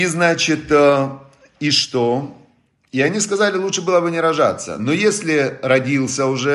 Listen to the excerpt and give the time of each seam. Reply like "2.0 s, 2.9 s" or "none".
none